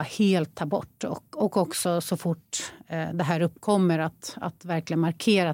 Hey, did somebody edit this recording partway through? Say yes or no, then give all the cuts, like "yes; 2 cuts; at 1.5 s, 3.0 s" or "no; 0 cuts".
no; 0 cuts